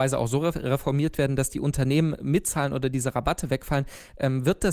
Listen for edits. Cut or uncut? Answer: uncut